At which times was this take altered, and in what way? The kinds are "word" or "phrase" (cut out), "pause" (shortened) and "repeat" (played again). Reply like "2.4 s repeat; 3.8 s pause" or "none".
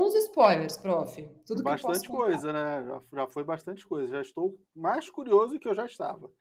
none